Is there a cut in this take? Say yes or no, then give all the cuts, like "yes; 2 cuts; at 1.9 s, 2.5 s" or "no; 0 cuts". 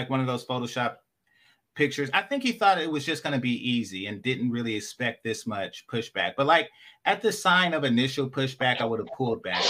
no; 0 cuts